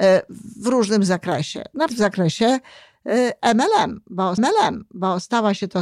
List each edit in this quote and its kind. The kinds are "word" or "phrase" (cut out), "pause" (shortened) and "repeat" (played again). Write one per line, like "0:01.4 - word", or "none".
0:01.9 - word
0:04.4 - repeat